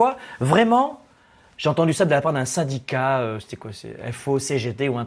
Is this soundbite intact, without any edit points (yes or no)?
yes